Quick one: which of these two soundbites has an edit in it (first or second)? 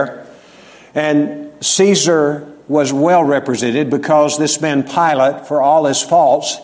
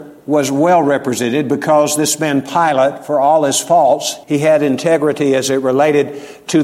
second